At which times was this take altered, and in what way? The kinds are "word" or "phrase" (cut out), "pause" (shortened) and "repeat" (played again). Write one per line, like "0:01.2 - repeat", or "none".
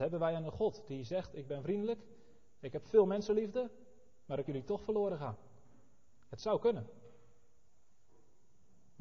0:04.5 - word